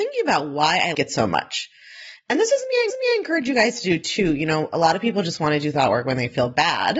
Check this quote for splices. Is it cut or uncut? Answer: cut